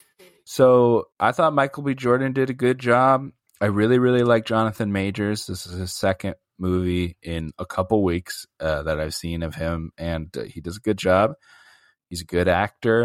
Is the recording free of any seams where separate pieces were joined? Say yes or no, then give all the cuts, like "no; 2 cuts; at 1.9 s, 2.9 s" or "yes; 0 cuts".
no; 1 cut; at 1.1 s